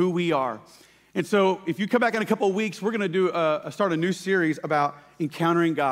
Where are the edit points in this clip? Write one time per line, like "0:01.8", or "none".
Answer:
none